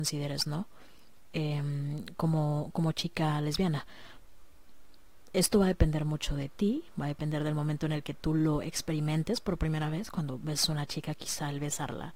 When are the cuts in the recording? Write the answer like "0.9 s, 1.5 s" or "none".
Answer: none

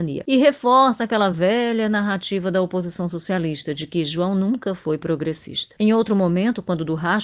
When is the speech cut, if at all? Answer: none

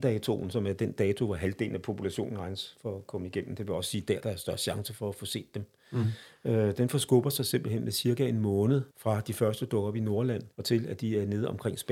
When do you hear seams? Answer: 8.9 s, 10.5 s

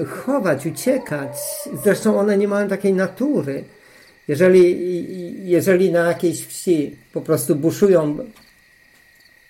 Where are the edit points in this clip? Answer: none

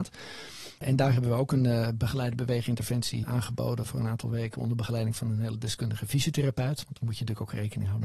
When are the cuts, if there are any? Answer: 3.2 s

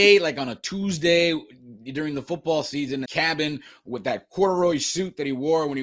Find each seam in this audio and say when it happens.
3.1 s

